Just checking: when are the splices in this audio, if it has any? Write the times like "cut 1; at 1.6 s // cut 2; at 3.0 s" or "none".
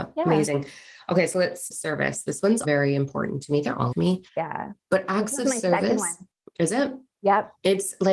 cut 1; at 1.7 s // cut 2; at 2.6 s // cut 3; at 3.9 s // cut 4; at 4.3 s // cut 5; at 6.3 s